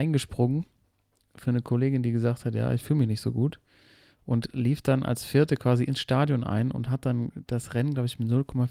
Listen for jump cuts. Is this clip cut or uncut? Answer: uncut